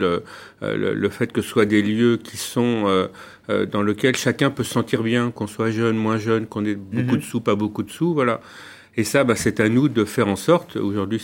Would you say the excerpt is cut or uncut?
uncut